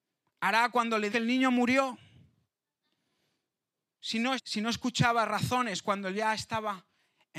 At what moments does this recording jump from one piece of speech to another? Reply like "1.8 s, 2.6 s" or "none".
1.1 s, 4.4 s, 6.1 s